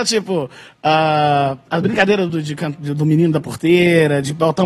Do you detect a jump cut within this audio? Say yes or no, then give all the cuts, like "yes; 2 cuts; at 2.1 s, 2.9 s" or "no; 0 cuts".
no; 0 cuts